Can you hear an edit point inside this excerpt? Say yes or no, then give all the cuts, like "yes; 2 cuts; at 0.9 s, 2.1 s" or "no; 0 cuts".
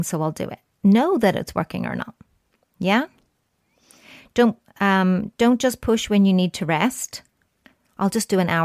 no; 0 cuts